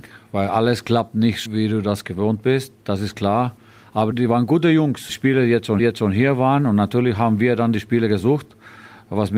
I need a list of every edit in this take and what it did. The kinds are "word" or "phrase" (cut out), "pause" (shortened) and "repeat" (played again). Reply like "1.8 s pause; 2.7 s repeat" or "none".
1.5 s word; 4.1 s word; 5.1 s word; 5.8 s repeat